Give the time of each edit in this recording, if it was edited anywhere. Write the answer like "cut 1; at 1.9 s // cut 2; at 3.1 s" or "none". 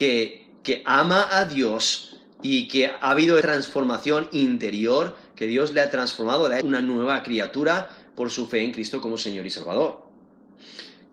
cut 1; at 3.4 s // cut 2; at 6.6 s